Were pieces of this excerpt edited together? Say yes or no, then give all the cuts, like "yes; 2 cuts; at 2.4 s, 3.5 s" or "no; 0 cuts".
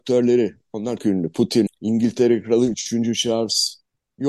yes; 2 cuts; at 1.0 s, 1.7 s